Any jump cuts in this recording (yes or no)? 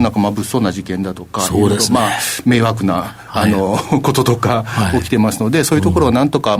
no